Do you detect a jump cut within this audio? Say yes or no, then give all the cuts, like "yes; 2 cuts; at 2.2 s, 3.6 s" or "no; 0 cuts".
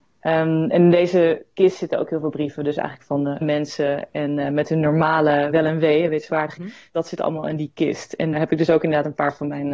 yes; 3 cuts; at 3.4 s, 6.6 s, 8.3 s